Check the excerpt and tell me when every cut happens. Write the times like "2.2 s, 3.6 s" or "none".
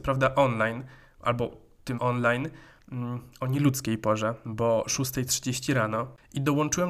2.0 s